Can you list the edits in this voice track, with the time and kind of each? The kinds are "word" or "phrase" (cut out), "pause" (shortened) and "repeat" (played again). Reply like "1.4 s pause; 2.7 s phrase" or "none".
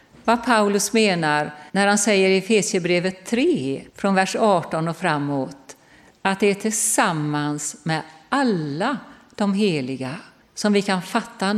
1.7 s pause; 3.9 s pause; 10.4 s pause